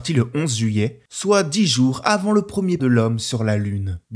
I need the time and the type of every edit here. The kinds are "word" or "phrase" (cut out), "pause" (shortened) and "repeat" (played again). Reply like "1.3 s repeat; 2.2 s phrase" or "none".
2.8 s word